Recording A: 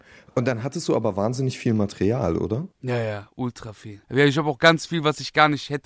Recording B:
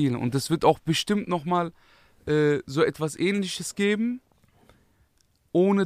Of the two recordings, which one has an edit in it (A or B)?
A